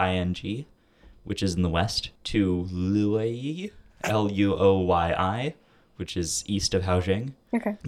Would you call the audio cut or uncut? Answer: uncut